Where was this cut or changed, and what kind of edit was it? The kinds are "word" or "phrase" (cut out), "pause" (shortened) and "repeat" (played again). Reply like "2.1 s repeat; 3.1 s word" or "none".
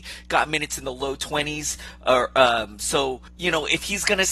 3.3 s pause